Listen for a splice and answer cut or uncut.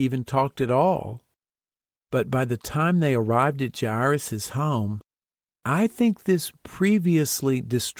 uncut